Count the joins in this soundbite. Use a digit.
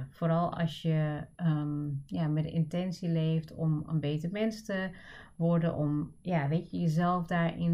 1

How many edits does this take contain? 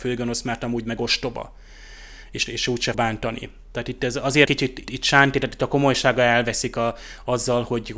4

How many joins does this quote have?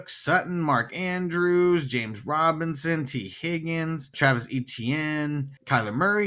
0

